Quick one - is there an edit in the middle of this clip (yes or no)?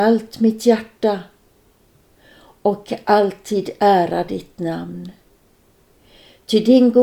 no